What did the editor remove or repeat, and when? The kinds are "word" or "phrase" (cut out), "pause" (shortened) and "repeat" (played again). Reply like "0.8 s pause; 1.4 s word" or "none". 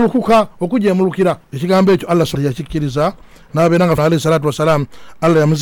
1.4 s pause; 2.3 s word; 4.0 s word